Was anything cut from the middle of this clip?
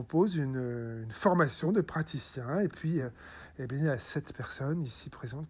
no; 0 cuts

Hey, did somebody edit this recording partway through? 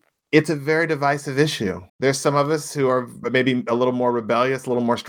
yes; 2 cuts; at 1.9 s, 3.2 s

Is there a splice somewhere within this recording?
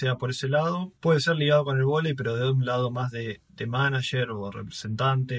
yes; 1 cut; at 1.0 s

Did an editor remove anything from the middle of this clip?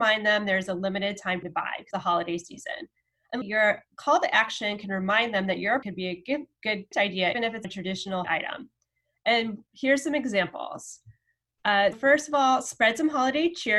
yes; 9 cuts; at 1.4 s, 1.9 s, 3.4 s, 5.8 s, 6.9 s, 7.3 s, 7.6 s, 8.2 s, 11.9 s

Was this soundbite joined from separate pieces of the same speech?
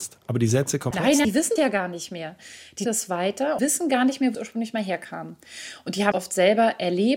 yes; 7 cuts; at 0.9 s, 1.2 s, 1.6 s, 2.9 s, 3.6 s, 4.3 s, 6.1 s

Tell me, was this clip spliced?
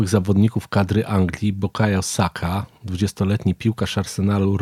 no; 0 cuts

